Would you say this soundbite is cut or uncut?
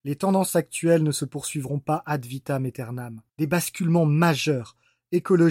cut